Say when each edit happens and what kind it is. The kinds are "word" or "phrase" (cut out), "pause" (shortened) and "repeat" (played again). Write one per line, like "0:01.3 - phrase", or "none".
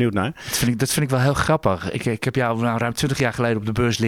none